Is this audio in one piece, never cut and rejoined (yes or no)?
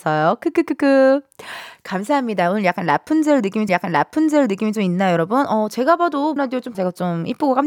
no